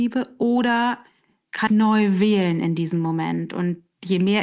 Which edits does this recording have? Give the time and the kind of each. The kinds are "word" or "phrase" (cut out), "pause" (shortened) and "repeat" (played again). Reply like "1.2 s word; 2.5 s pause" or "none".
1.7 s word